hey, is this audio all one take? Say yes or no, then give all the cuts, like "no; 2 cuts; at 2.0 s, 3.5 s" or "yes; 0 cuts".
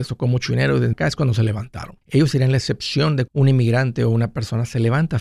no; 3 cuts; at 0.9 s, 2.0 s, 3.3 s